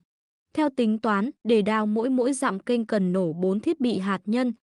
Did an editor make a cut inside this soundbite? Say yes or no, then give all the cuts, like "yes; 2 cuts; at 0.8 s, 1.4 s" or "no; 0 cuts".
yes; 1 cut; at 1.4 s